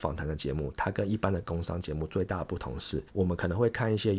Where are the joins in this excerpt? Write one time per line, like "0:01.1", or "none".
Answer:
0:03.1